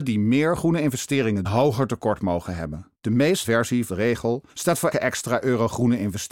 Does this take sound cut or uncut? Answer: cut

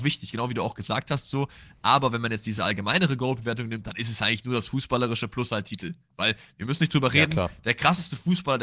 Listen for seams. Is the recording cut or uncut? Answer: uncut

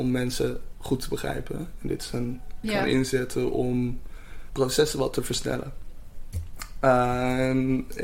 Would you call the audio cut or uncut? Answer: cut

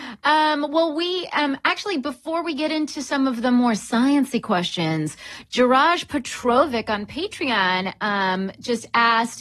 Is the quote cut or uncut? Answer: uncut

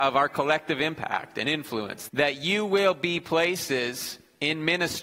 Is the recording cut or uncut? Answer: cut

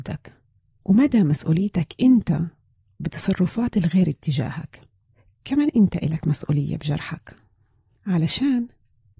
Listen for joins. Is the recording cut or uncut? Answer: uncut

